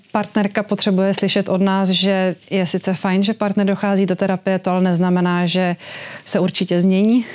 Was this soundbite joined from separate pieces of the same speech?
yes; 1 cut; at 2.4 s

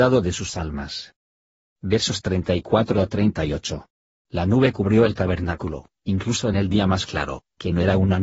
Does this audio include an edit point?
no; 0 cuts

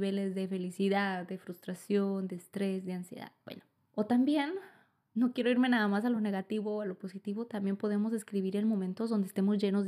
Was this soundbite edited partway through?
no; 0 cuts

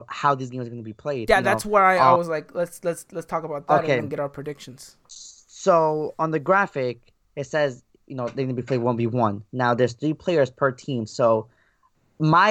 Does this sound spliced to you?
no; 0 cuts

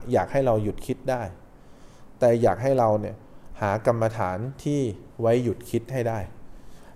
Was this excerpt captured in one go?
no; 1 cut; at 5.1 s

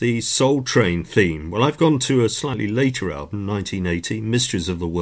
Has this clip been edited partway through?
no; 0 cuts

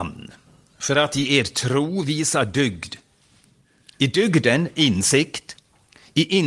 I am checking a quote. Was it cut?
no; 0 cuts

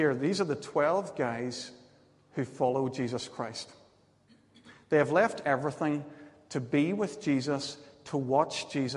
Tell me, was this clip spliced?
no; 0 cuts

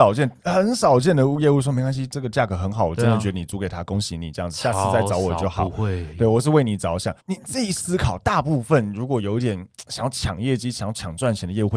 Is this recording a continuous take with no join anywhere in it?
no; 1 cut; at 7.2 s

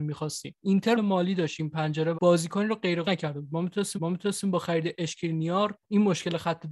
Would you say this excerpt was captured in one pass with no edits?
no; 4 cuts; at 1.0 s, 2.1 s, 3.0 s, 4.0 s

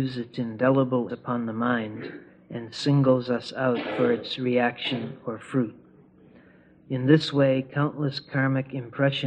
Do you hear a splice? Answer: yes; 2 cuts; at 1.1 s, 2.3 s

